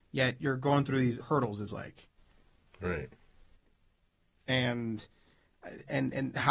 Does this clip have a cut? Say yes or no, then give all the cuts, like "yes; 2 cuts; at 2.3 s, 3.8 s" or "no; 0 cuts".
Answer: yes; 2 cuts; at 1.2 s, 1.7 s